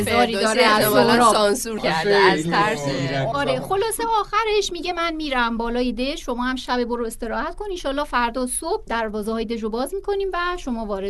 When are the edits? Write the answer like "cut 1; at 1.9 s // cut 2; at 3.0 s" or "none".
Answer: none